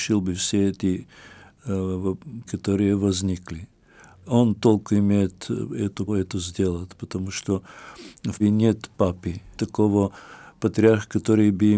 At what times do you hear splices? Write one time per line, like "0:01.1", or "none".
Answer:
0:02.5
0:06.1
0:08.4
0:09.6

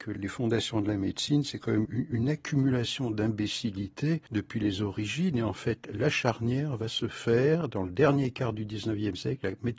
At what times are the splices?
0:01.8
0:04.3

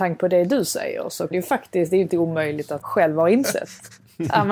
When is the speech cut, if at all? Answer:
0:01.3
0:02.1
0:02.8

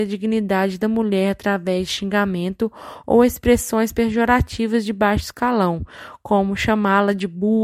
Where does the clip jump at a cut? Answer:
none

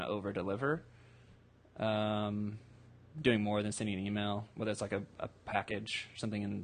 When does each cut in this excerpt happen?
none

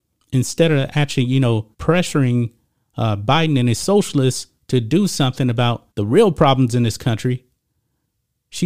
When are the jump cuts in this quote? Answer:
0:01.7
0:05.9

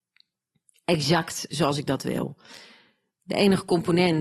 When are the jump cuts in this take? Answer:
none

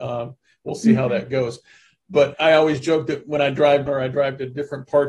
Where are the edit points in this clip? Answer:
0:02.3
0:03.9

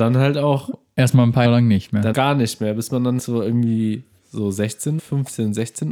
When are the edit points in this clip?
0:01.4
0:02.1
0:03.2
0:05.0

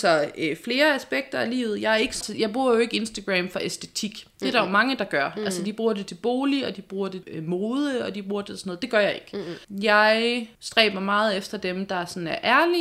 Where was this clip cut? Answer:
0:02.2
0:07.2
0:10.5

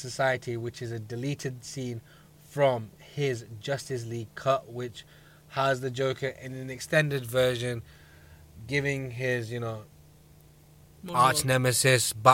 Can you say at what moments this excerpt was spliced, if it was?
none

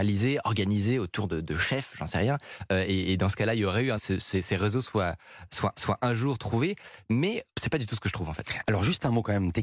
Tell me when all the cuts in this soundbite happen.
0:04.0
0:05.7
0:07.5

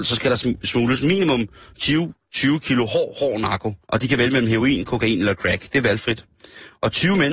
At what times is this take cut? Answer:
0:03.8

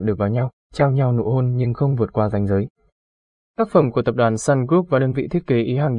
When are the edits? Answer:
none

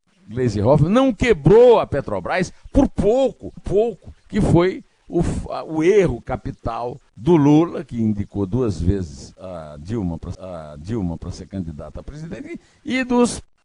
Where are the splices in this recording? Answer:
0:03.6
0:04.2
0:07.1
0:10.3

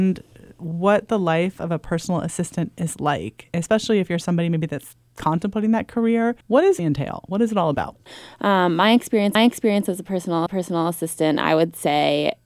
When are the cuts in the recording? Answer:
0:06.4
0:06.8
0:09.3
0:10.5

